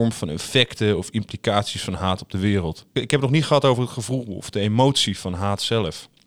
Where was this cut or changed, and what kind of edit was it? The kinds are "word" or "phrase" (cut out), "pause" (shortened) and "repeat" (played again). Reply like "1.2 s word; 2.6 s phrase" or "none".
2.9 s pause